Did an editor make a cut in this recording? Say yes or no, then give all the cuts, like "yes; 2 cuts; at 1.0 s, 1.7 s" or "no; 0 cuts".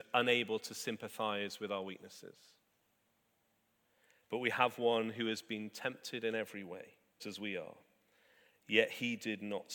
yes; 1 cut; at 7.2 s